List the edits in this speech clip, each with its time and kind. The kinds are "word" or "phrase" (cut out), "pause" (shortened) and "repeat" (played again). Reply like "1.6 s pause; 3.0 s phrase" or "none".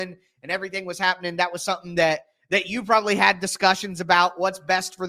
none